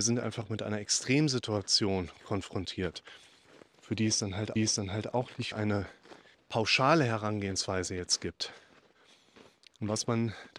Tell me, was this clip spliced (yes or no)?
yes